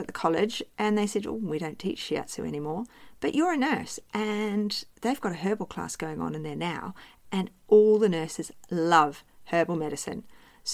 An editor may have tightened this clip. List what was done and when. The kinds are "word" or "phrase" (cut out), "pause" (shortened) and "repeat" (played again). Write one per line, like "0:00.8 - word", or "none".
none